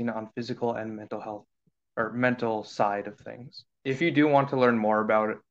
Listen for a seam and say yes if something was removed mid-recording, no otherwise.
no